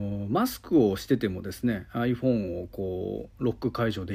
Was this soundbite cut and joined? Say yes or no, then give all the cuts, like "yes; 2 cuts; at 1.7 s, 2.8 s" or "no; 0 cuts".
no; 0 cuts